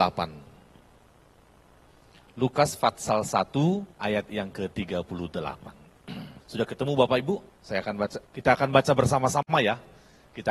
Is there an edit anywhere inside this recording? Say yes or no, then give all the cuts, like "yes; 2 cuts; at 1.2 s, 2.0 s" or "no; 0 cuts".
yes; 4 cuts; at 3.9 s, 6.4 s, 7.5 s, 8.3 s